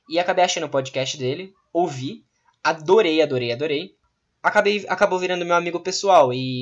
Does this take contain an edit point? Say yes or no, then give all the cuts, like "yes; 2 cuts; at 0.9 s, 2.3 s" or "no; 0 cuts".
no; 0 cuts